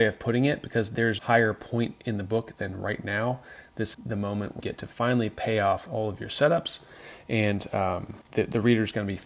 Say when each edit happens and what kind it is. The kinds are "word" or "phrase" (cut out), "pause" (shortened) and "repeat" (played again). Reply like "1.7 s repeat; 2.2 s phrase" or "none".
1.2 s word; 3.9 s word; 4.6 s word; 8.2 s pause